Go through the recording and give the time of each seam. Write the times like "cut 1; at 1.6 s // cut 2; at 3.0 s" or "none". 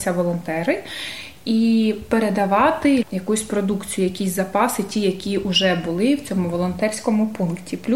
cut 1; at 3.0 s